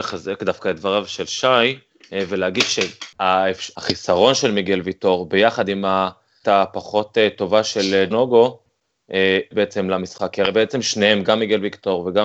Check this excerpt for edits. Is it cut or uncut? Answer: cut